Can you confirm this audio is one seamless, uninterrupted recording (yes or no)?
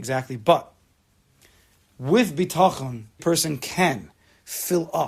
no